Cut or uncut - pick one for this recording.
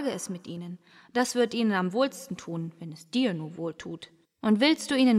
cut